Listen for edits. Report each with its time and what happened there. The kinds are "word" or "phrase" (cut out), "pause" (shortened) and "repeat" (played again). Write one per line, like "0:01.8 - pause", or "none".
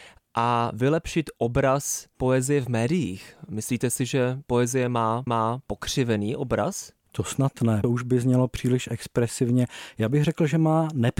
0:05.3 - repeat
0:07.8 - phrase